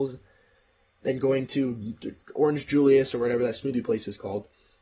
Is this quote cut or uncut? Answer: cut